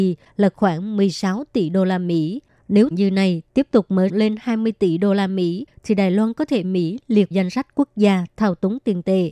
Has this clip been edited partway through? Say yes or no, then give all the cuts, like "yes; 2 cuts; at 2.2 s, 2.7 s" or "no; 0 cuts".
yes; 4 cuts; at 2.9 s, 4.1 s, 6.6 s, 7.3 s